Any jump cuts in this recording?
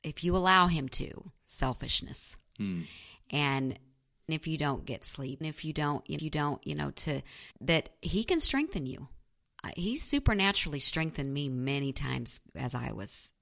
yes; 5 cuts; at 1.4 s, 4.3 s, 5.4 s, 6.2 s, 7.5 s

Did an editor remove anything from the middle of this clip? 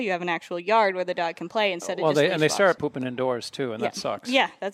yes; 1 cut; at 2.8 s

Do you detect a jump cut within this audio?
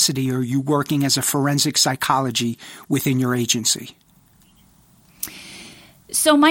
no; 0 cuts

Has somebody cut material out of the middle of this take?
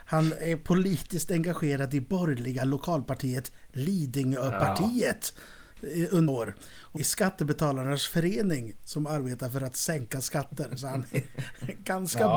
yes; 2 cuts; at 6.3 s, 7.0 s

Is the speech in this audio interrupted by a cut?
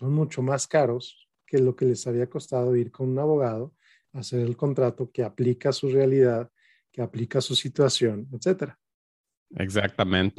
no; 0 cuts

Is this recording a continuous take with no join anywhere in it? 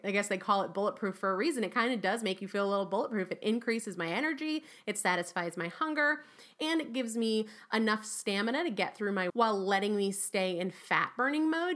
no; 1 cut; at 9.3 s

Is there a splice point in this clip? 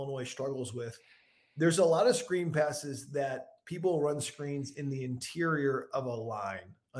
no; 0 cuts

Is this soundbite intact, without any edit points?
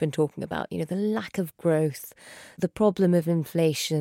yes; 0 cuts

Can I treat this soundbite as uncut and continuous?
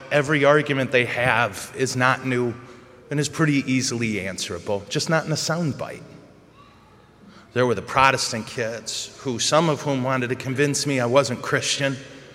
yes; 0 cuts

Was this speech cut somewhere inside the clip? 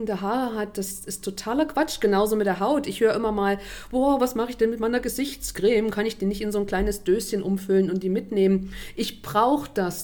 no; 0 cuts

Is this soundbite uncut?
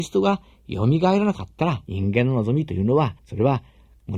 no; 2 cuts; at 1.8 s, 3.2 s

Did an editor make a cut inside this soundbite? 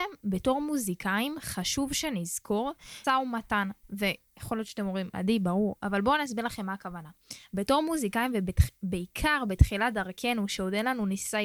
yes; 1 cut; at 3.0 s

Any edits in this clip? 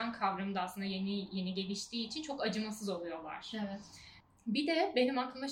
no; 0 cuts

